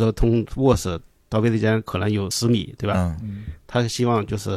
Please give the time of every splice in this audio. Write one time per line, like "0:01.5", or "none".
none

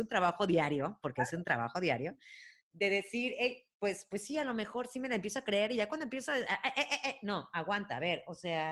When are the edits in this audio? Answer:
0:02.6
0:03.7

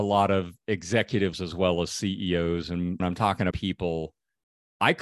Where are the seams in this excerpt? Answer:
0:01.3
0:03.0
0:03.5

